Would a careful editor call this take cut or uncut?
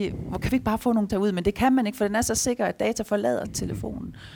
cut